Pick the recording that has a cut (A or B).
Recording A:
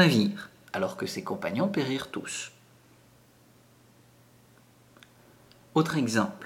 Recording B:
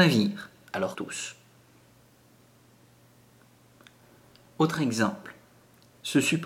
B